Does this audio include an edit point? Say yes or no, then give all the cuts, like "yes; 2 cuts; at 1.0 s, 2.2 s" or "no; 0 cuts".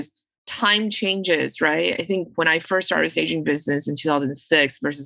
no; 0 cuts